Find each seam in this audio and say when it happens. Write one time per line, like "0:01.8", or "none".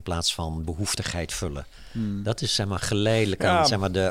none